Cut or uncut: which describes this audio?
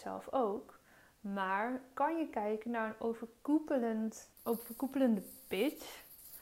cut